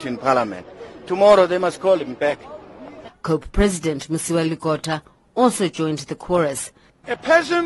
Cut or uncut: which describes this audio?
uncut